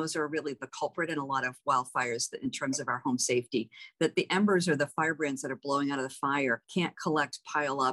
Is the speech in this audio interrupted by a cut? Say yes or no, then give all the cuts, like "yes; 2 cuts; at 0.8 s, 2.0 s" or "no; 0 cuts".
yes; 1 cut; at 6.6 s